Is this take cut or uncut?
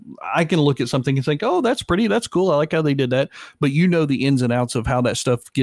uncut